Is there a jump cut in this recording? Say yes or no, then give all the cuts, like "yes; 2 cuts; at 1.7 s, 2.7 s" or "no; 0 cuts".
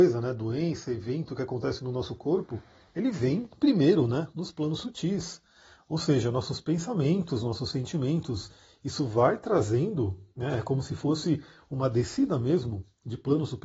no; 0 cuts